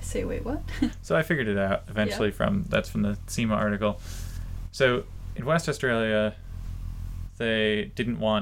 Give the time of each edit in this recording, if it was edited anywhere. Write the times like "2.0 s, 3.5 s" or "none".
none